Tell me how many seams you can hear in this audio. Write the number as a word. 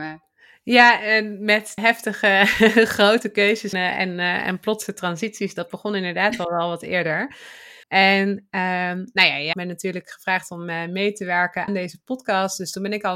five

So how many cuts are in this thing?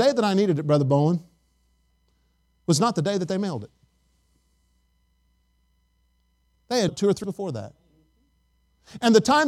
two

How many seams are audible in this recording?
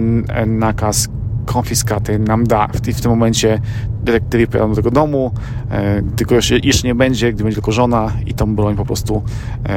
zero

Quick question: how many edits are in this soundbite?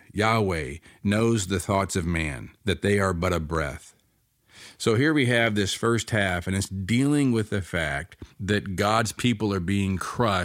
two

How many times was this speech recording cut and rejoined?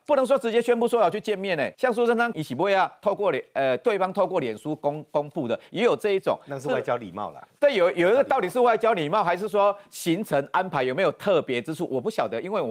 two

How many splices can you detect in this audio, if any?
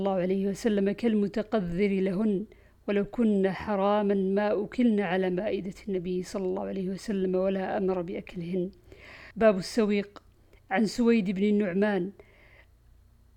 one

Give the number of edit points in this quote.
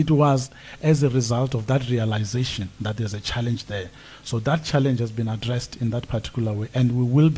zero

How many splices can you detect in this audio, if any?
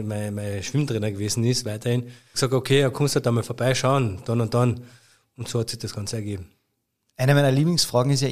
one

